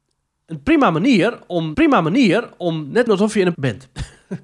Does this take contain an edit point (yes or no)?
yes